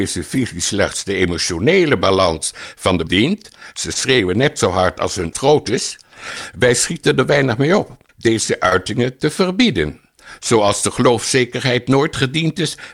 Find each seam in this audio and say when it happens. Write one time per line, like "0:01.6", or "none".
0:03.1
0:05.3
0:08.1